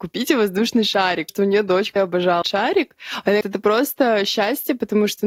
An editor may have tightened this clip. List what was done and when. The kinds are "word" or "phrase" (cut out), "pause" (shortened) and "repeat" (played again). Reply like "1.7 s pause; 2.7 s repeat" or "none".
1.3 s word; 2.0 s word; 2.4 s word; 3.4 s word